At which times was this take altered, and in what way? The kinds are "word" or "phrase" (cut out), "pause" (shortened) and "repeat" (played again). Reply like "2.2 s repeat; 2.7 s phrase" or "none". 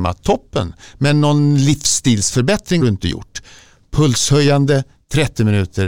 2.8 s word